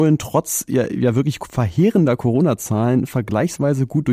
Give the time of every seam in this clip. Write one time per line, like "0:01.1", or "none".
none